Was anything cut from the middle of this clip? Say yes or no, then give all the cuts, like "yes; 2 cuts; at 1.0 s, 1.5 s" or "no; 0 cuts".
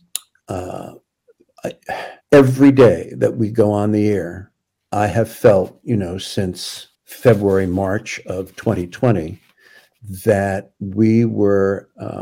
yes; 3 cuts; at 2.2 s, 4.7 s, 6.9 s